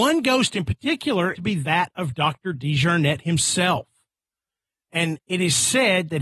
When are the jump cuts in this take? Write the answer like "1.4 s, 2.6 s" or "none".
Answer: 1.3 s